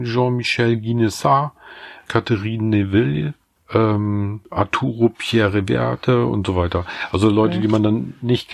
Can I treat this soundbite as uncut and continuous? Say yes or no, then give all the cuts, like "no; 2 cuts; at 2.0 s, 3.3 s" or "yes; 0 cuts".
yes; 0 cuts